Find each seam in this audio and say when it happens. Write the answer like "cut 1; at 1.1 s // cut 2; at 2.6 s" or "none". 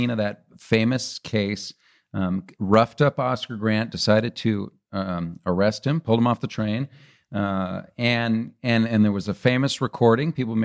none